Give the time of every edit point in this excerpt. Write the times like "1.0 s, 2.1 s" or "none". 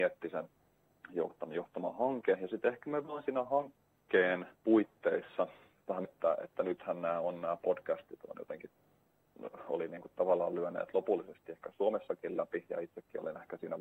4.5 s, 6.0 s